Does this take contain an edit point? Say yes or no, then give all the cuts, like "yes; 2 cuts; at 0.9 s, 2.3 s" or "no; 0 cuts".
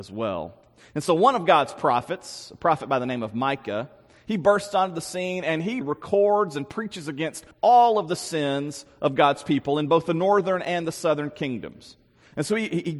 yes; 2 cuts; at 5.8 s, 7.5 s